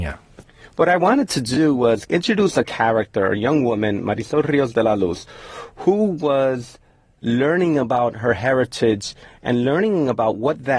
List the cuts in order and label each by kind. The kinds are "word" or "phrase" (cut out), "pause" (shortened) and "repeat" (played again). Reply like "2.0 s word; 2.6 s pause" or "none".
none